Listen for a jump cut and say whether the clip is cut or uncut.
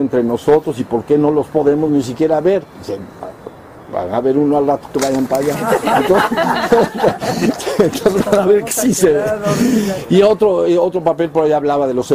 uncut